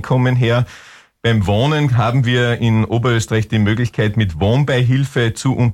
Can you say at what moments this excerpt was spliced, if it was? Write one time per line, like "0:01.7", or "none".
none